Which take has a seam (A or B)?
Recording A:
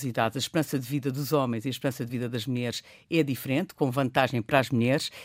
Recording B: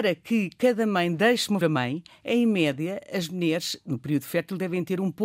B